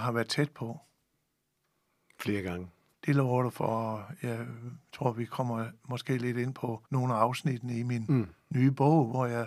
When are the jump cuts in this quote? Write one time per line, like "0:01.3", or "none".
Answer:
0:02.9
0:06.8